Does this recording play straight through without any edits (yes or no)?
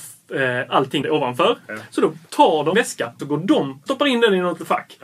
no